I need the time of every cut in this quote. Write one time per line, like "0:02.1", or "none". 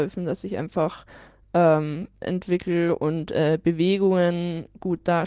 0:02.2